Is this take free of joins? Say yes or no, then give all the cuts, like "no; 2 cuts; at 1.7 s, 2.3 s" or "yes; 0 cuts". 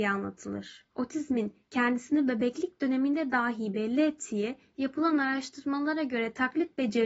no; 1 cut; at 0.9 s